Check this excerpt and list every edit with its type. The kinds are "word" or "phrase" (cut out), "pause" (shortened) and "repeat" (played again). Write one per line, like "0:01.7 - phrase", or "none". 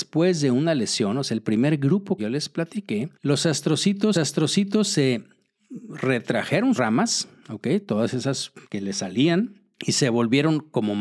0:02.2 - word
0:03.1 - pause
0:04.1 - repeat
0:06.8 - word
0:08.6 - pause
0:09.7 - pause